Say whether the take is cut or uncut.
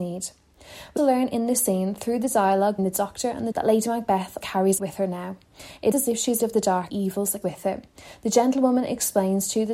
cut